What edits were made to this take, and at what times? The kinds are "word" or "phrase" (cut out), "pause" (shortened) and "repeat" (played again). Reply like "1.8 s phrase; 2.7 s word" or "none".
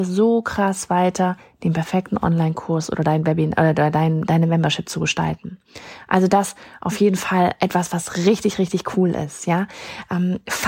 none